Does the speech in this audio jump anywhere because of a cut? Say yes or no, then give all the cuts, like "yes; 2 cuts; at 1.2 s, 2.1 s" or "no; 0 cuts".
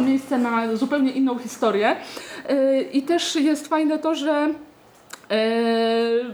no; 0 cuts